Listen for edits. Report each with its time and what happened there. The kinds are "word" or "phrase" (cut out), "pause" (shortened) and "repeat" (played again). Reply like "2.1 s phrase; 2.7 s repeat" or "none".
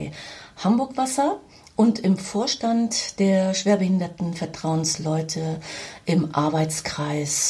none